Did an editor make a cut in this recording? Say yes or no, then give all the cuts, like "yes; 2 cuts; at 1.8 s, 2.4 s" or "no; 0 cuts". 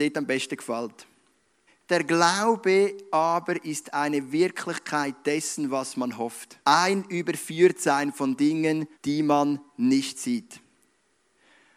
yes; 3 cuts; at 1.7 s, 6.6 s, 8.9 s